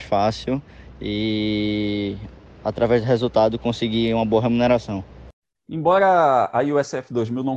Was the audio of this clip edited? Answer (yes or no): no